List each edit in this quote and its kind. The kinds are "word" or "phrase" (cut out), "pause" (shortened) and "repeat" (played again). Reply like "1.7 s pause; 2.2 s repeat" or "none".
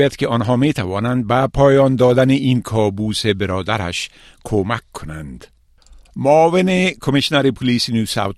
none